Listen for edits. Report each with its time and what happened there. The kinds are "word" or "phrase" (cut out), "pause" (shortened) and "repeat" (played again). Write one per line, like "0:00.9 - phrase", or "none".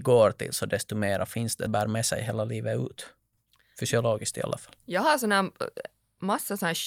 0:01.7 - phrase